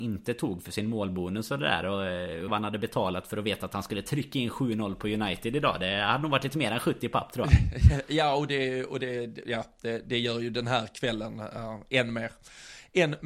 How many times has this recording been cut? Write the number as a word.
one